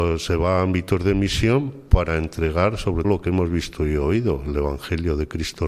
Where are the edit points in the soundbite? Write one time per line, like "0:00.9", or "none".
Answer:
0:03.0